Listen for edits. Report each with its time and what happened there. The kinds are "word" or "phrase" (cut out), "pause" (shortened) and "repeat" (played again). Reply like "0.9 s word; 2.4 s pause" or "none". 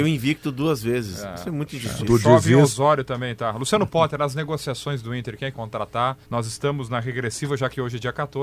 5.5 s phrase; 6.2 s pause